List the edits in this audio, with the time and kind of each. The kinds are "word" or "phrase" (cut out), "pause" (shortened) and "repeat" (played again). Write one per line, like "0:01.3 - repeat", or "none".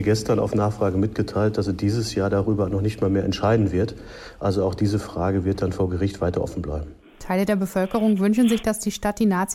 none